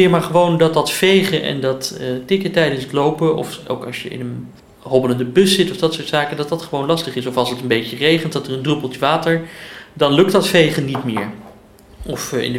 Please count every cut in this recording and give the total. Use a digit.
1